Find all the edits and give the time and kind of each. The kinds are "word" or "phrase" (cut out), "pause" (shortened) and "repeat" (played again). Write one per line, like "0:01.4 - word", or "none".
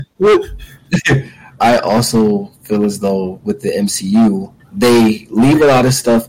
0:01.6 - word
0:04.6 - pause